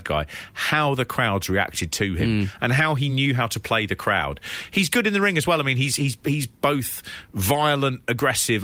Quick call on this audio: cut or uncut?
uncut